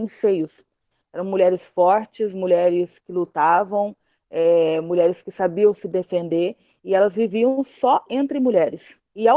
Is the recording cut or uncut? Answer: uncut